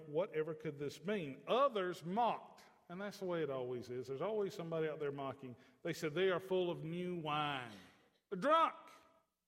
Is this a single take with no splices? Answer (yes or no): yes